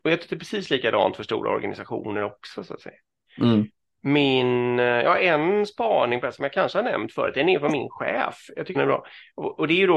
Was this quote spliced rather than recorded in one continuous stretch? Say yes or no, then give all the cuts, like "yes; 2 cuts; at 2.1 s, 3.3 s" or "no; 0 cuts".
yes; 1 cut; at 8.7 s